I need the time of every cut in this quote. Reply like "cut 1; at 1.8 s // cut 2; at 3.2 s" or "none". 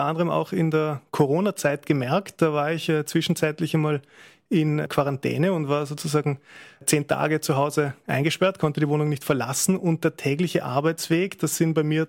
none